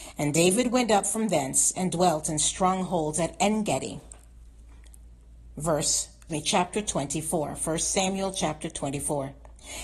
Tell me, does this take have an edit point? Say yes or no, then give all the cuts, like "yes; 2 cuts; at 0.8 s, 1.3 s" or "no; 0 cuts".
yes; 1 cut; at 6.3 s